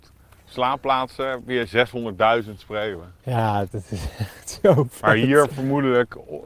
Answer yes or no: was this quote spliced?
no